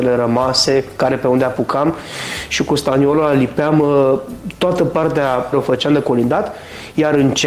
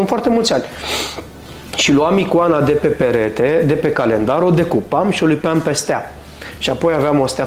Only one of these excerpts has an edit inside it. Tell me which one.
first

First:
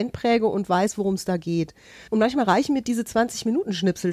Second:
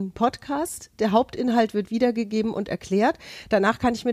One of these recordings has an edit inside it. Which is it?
first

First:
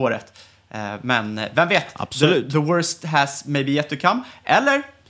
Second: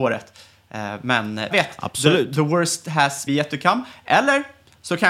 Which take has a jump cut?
second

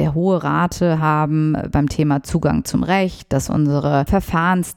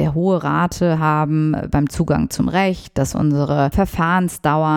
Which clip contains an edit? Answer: second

